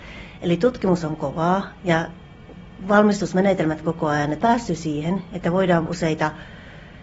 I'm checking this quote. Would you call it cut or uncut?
cut